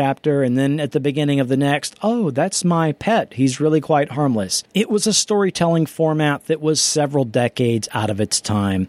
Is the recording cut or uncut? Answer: cut